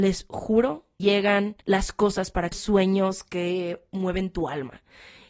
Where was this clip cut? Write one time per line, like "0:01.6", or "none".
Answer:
0:01.0
0:01.6
0:02.5